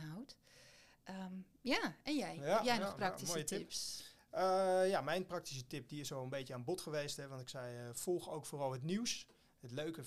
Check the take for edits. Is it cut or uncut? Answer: uncut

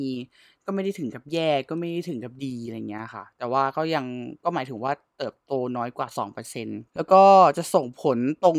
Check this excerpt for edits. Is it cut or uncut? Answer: cut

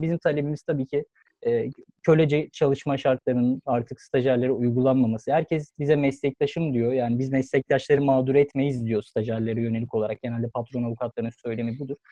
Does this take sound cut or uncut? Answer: uncut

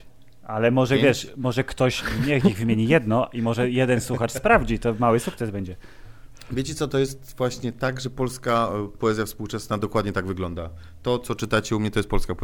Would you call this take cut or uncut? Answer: uncut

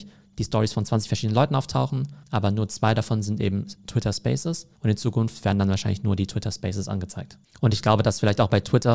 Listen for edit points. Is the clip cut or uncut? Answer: cut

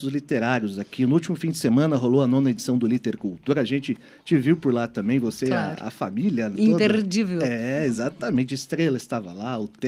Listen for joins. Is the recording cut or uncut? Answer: uncut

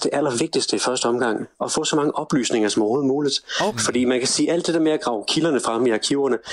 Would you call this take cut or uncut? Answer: uncut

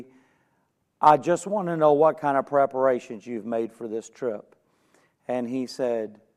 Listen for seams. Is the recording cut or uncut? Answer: uncut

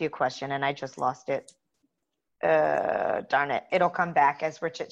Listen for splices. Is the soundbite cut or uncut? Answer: uncut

